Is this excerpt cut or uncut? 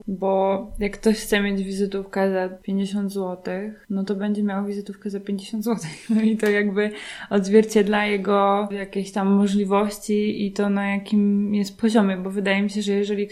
uncut